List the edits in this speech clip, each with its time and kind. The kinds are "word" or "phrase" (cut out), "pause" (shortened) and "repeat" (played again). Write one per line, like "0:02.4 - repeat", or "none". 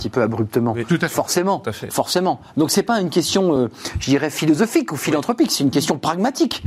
none